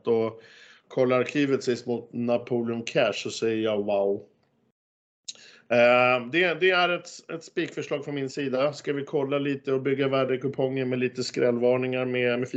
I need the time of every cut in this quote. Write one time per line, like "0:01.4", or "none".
none